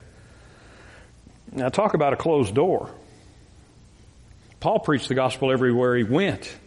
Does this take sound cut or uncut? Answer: uncut